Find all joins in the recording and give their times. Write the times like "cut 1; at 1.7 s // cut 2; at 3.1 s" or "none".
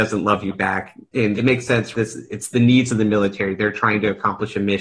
cut 1; at 1.4 s // cut 2; at 1.9 s

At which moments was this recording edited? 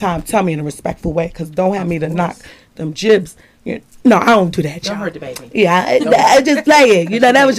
none

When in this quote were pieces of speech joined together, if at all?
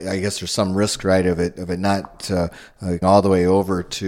cut 1; at 3.0 s

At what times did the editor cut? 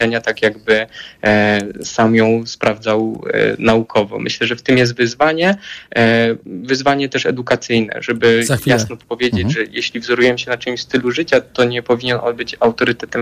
cut 1; at 6.4 s

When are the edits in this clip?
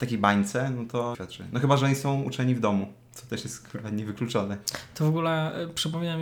cut 1; at 1.1 s

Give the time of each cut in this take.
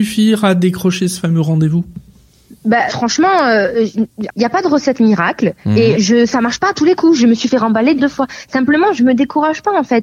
cut 1; at 2.9 s // cut 2; at 4.3 s // cut 3; at 5.9 s // cut 4; at 8.0 s

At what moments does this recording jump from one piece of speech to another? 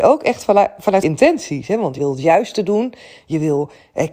cut 1; at 1.0 s // cut 2; at 2.0 s

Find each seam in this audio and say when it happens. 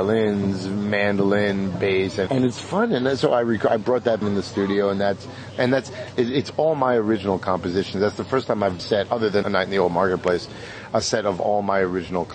cut 1; at 2.3 s // cut 2; at 4.2 s // cut 3; at 8.8 s // cut 4; at 9.4 s

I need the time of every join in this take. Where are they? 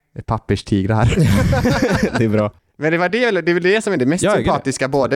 none

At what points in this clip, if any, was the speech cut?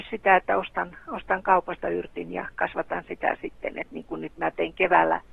none

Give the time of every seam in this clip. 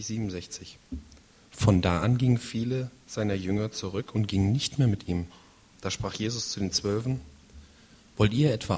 none

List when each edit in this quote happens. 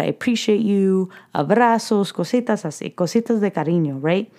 none

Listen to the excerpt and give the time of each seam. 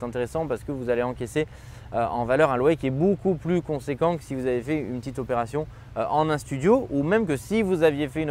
none

